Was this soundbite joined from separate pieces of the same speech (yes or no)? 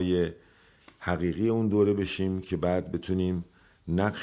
no